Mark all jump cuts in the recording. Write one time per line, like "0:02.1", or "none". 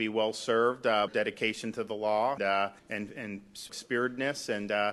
0:01.1
0:02.4
0:02.8
0:03.7

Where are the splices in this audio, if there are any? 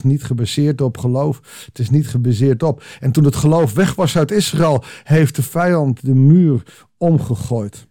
none

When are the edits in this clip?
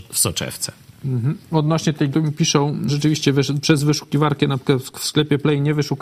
0:02.1
0:02.9

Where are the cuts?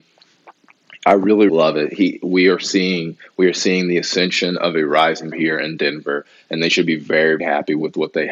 0:01.5
0:05.3
0:07.4

